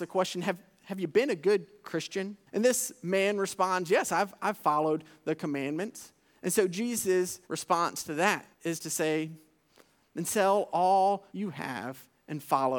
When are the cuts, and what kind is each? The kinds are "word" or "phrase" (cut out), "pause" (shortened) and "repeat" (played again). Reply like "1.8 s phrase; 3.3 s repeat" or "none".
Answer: 2.5 s pause; 7.4 s pause; 8.5 s pause; 11.3 s pause